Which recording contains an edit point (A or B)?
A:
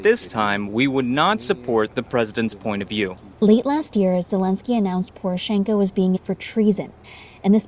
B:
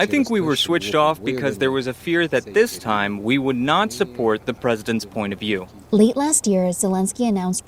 A